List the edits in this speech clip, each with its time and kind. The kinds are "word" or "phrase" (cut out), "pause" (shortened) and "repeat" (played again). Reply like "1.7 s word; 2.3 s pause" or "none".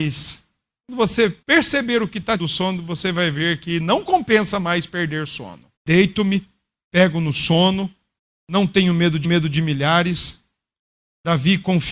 1.4 s pause; 2.4 s phrase; 5.8 s pause; 8.2 s pause; 9.2 s repeat